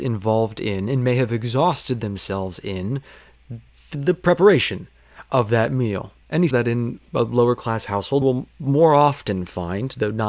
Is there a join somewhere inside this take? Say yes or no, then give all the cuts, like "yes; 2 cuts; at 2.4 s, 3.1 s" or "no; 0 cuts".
yes; 3 cuts; at 3.9 s, 6.5 s, 8.2 s